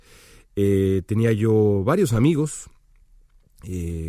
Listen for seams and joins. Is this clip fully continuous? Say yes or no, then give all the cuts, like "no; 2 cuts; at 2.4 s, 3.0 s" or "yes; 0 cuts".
yes; 0 cuts